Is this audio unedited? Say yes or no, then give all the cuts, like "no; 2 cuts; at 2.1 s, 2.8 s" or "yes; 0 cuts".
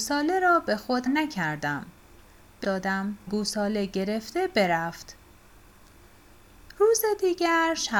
no; 3 cuts; at 1.1 s, 2.6 s, 3.3 s